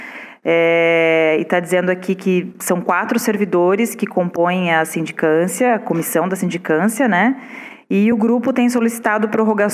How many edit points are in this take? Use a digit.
0